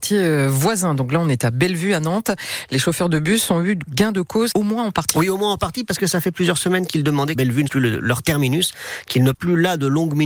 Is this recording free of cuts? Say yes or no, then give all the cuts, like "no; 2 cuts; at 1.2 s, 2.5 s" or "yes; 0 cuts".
no; 4 cuts; at 4.5 s, 7.3 s, 7.7 s, 9.3 s